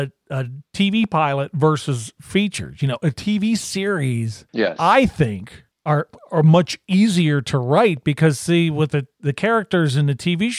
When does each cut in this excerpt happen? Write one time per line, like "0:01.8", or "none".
0:04.5
0:05.7